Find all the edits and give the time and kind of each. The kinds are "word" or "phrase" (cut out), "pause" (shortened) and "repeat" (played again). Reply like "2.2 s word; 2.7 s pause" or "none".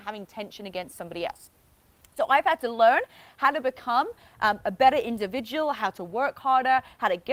none